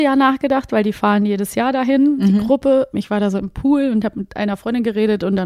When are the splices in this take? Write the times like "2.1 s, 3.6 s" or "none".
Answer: 2.9 s